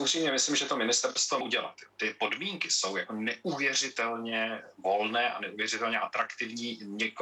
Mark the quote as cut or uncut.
cut